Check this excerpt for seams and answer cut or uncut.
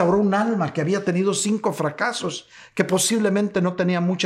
uncut